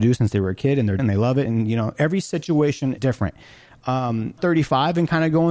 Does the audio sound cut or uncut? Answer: cut